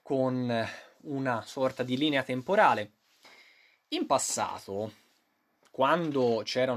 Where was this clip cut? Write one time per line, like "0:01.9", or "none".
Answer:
none